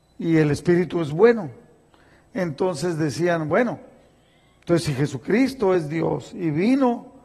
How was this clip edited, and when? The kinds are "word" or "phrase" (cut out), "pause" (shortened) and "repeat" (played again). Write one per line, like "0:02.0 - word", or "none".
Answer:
none